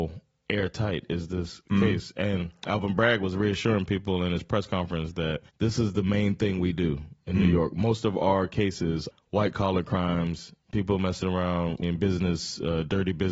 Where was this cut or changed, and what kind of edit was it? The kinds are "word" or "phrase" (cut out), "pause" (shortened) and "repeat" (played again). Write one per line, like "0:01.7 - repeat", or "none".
0:05.5 - pause
0:09.1 - word
0:11.8 - word